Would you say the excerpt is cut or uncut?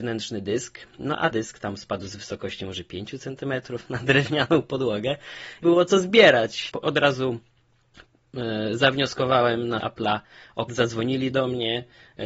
cut